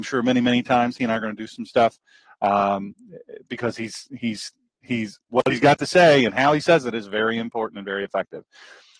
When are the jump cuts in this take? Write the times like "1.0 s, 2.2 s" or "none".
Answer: none